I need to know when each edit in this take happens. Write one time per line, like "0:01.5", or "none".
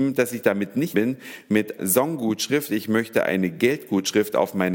0:00.9
0:01.8

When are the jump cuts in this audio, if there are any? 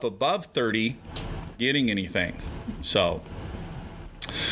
0:01.6

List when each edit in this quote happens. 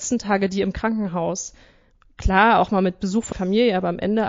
0:03.3

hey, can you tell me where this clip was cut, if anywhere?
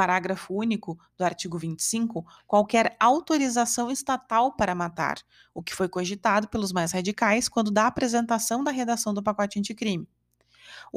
none

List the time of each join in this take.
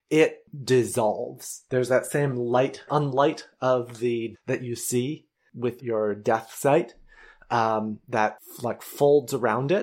0:02.9
0:04.3
0:05.8

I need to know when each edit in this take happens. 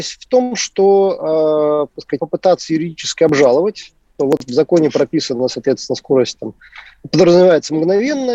0:02.2
0:04.2

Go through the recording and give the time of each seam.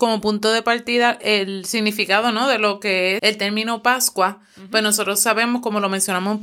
0:03.2

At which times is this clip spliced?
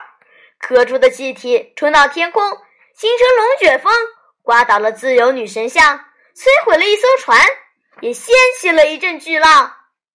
none

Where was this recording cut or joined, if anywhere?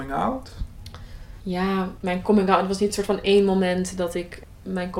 none

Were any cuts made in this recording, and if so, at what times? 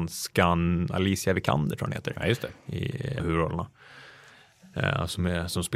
0:03.2

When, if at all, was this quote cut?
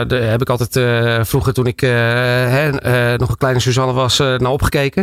none

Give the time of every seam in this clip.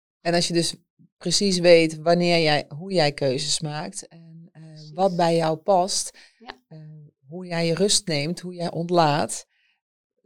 none

